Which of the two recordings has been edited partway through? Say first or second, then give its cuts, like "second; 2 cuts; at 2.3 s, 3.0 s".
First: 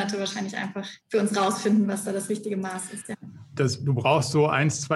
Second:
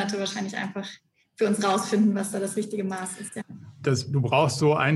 first; 1 cut; at 1.0 s